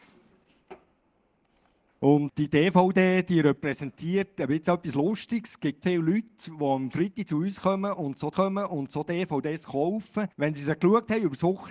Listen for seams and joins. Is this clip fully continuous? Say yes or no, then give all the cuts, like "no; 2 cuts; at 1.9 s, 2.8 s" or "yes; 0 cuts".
no; 4 cuts; at 2.3 s, 5.8 s, 8.3 s, 10.3 s